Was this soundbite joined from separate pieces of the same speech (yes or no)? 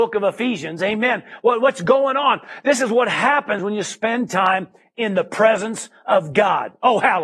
no